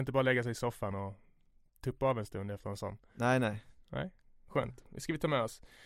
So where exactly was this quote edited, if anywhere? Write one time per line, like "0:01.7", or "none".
none